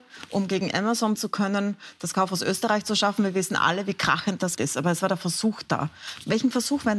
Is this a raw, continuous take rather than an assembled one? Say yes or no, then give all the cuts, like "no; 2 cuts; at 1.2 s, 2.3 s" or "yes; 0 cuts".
no; 2 cuts; at 1.1 s, 4.6 s